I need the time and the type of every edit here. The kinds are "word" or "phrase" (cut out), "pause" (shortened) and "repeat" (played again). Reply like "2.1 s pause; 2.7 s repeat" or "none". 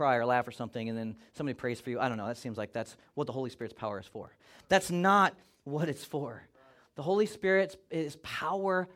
none